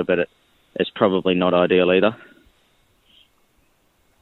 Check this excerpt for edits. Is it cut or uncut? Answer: uncut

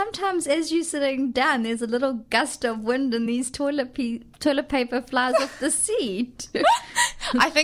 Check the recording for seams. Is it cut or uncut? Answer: uncut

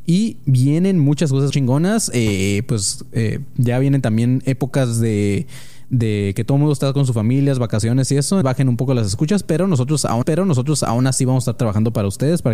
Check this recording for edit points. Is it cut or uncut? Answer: cut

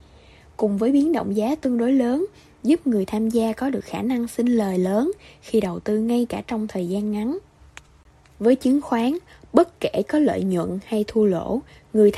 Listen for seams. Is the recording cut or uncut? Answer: uncut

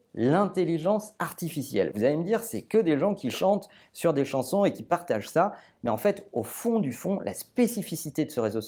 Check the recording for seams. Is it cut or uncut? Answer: uncut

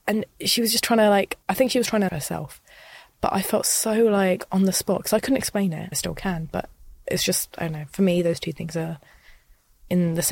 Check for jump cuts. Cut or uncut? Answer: cut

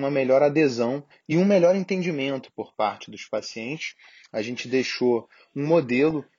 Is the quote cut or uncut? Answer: uncut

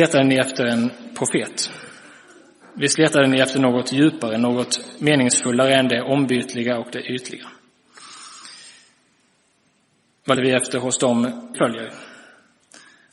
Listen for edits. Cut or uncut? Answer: cut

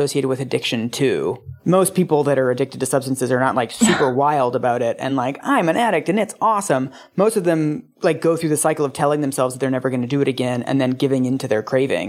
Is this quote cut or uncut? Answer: uncut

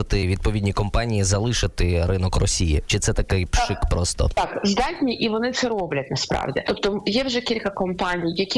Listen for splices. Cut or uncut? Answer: uncut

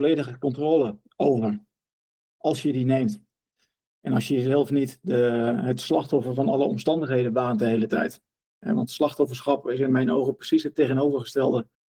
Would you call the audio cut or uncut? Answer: uncut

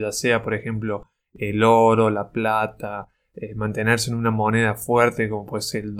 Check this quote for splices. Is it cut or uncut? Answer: uncut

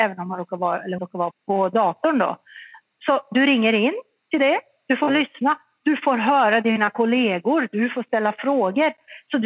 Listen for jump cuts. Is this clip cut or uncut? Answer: cut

